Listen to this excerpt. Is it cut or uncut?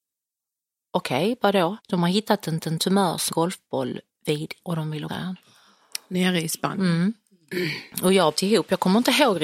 cut